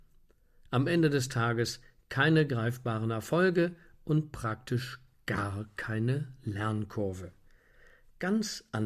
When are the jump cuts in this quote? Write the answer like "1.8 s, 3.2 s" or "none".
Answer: none